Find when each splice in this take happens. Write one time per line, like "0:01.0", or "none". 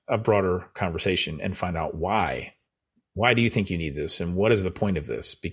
none